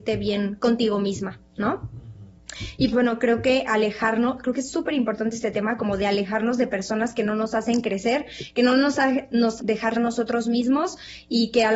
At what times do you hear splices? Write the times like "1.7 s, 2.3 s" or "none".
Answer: 2.9 s, 9.6 s, 9.9 s

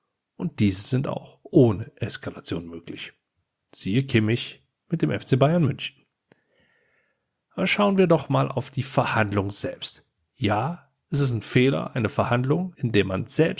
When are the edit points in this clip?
none

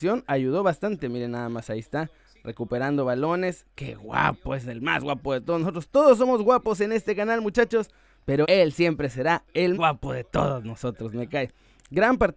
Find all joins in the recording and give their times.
8.4 s, 9.7 s

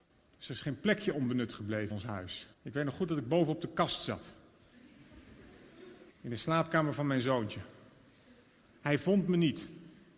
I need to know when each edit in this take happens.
1.9 s, 2.5 s, 6.1 s

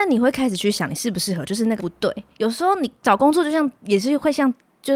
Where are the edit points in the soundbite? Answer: 1.8 s, 3.0 s

